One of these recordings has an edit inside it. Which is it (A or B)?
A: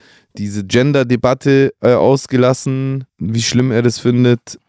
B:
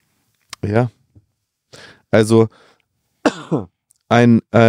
A